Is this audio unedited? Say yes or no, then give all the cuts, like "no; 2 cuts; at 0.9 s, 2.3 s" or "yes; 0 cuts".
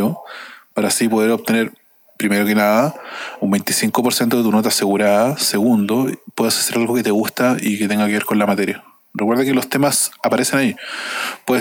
yes; 0 cuts